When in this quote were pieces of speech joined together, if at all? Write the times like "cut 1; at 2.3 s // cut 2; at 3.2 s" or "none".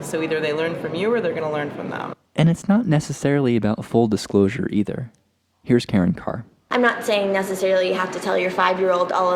none